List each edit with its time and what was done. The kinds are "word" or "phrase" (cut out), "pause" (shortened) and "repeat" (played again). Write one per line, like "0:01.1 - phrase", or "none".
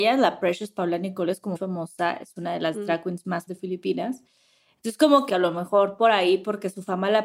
0:01.5 - word
0:03.5 - word
0:05.3 - word